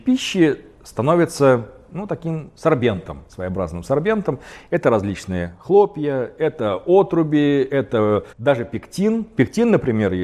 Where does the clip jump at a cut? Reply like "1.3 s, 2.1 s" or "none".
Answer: 3.3 s, 8.3 s